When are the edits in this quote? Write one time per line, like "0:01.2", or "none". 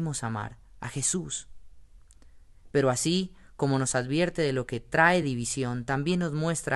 none